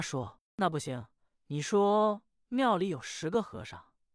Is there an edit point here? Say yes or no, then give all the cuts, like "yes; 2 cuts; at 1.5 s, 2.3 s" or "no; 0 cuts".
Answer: yes; 1 cut; at 1.3 s